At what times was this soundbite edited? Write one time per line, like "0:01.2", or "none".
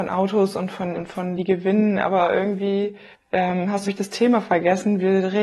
0:00.9
0:01.4
0:03.1
0:03.8